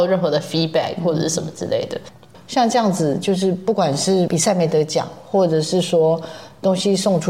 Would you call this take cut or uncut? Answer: cut